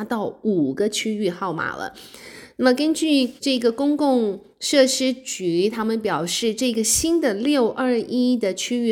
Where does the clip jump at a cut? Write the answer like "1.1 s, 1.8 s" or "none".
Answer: 3.4 s